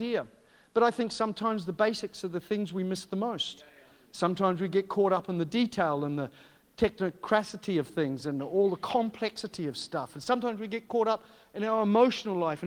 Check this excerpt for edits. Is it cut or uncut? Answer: uncut